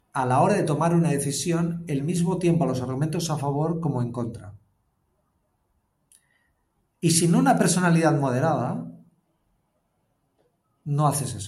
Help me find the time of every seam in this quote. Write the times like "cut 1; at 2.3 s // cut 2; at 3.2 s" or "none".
none